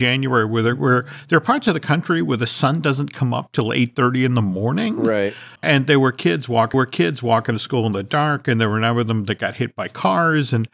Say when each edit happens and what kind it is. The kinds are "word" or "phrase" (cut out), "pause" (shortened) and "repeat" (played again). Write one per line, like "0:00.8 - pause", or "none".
0:05.6 - pause
0:06.7 - repeat